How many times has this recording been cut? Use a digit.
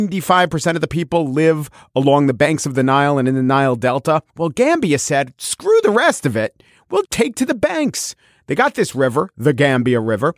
2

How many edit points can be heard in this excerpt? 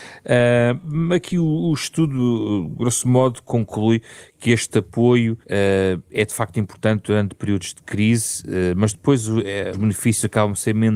2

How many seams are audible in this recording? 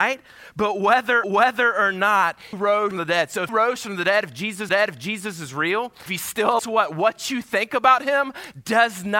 7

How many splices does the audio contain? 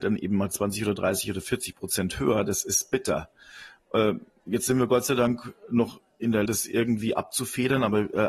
1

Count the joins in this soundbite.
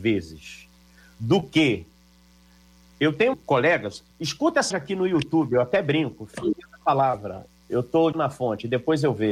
4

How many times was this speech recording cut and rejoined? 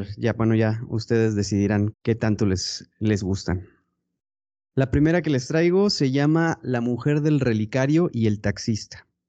1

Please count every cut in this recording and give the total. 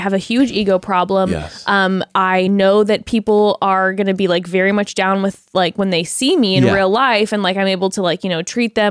0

